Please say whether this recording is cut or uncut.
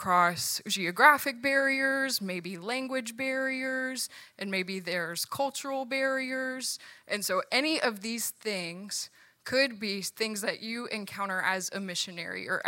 uncut